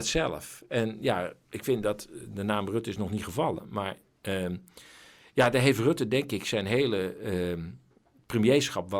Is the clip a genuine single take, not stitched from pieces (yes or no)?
yes